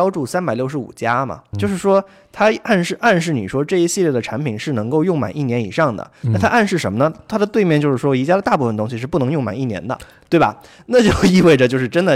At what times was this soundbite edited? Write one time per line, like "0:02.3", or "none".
0:01.5
0:10.2